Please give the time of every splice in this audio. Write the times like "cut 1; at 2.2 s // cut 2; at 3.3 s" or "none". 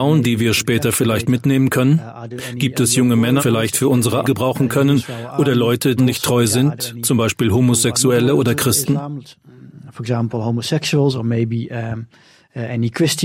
cut 1; at 3.4 s // cut 2; at 4.2 s // cut 3; at 6.0 s